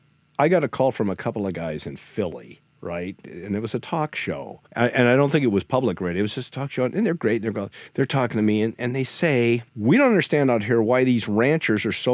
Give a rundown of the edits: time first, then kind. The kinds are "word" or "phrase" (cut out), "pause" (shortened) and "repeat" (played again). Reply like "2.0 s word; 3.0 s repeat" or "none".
4.7 s pause; 7.9 s pause; 9.7 s pause